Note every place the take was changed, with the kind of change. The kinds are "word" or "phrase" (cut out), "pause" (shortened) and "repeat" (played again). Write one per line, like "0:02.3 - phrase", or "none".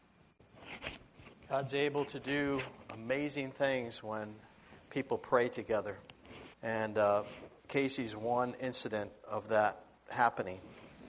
0:06.5 - pause